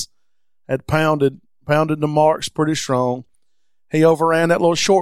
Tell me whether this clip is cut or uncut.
uncut